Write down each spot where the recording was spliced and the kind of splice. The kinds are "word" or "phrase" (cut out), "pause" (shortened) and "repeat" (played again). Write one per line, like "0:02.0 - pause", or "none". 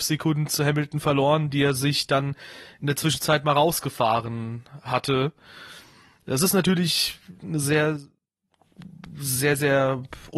none